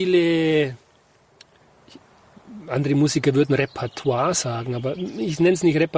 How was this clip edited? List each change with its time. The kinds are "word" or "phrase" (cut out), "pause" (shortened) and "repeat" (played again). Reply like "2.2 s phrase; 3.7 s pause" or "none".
none